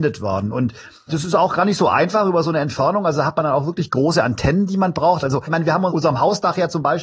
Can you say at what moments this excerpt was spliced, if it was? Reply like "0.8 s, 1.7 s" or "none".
none